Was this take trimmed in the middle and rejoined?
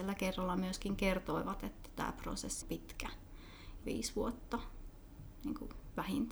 yes; 2 cuts; at 2.6 s, 3.8 s

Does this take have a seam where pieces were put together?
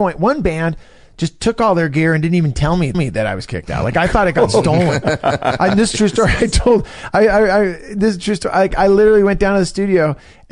yes; 1 cut; at 2.9 s

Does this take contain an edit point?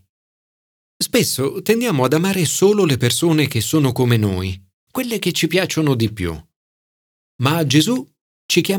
no; 0 cuts

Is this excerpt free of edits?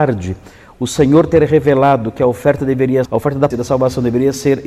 no; 2 cuts; at 3.1 s, 3.5 s

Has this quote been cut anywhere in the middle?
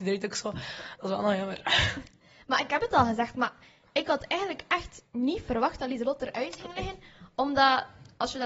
no; 0 cuts

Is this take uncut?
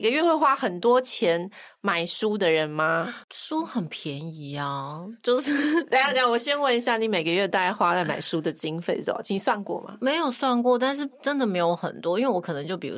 no; 1 cut; at 3.2 s

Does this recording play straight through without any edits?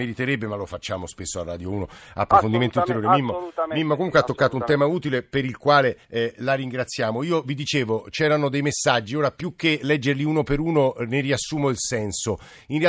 no; 1 cut; at 6.0 s

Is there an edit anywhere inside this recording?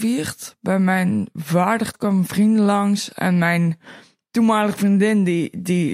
yes; 1 cut; at 1.9 s

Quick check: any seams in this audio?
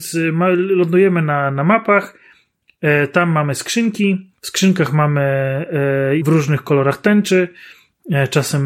yes; 2 cuts; at 4.4 s, 6.2 s

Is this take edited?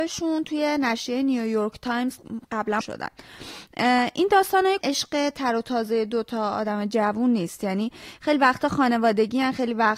yes; 2 cuts; at 2.8 s, 4.8 s

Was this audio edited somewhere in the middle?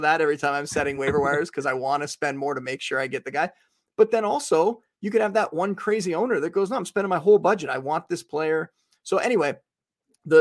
no; 0 cuts

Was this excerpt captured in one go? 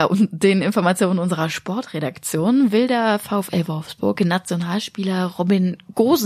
yes; 0 cuts

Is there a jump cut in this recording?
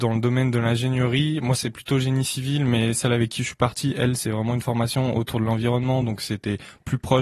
no; 0 cuts

